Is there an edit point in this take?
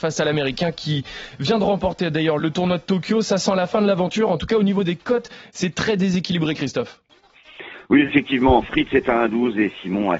yes; 1 cut; at 2.4 s

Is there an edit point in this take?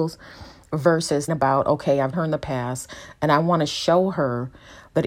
yes; 2 cuts; at 1.3 s, 2.1 s

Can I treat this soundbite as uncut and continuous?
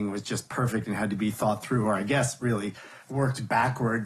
no; 1 cut; at 3.0 s

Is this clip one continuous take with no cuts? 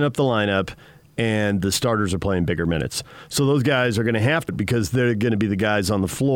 no; 1 cut; at 4.5 s

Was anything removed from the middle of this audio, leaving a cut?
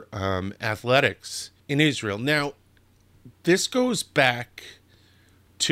yes; 1 cut; at 1.6 s

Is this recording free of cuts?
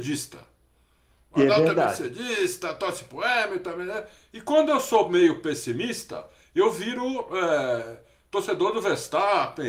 yes; 0 cuts

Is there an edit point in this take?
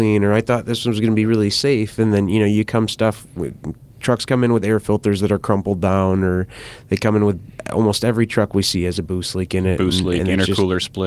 no; 0 cuts

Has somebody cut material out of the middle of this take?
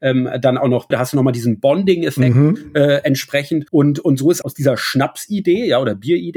yes; 3 cuts; at 0.9 s, 3.7 s, 4.4 s

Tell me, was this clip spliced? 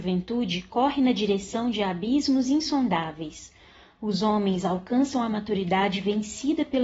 no; 0 cuts

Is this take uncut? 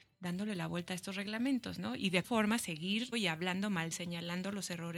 no; 3 cuts; at 2.2 s, 3.1 s, 3.9 s

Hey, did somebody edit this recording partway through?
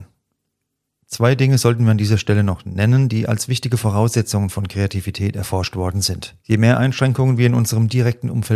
yes; 1 cut; at 6.4 s

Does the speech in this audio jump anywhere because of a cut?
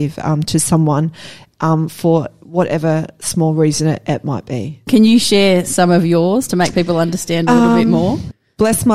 no; 0 cuts

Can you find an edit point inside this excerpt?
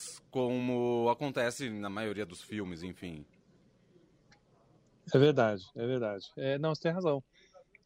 no; 0 cuts

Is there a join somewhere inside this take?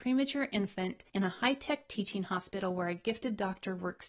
yes; 1 cut; at 1.1 s

